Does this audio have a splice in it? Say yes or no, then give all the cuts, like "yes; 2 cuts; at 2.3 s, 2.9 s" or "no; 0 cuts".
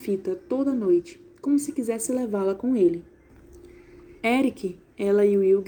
yes; 1 cut; at 4.2 s